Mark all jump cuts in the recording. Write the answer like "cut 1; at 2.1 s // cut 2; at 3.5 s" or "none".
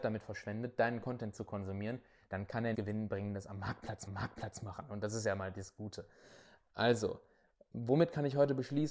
cut 1; at 2.7 s // cut 2; at 4.1 s